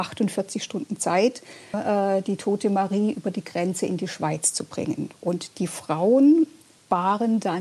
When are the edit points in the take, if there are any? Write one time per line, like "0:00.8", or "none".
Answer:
0:01.7